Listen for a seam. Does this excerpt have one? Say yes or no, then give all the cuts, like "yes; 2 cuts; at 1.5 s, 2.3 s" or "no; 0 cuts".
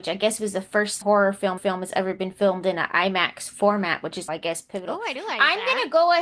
yes; 4 cuts; at 1.0 s, 1.6 s, 4.3 s, 5.2 s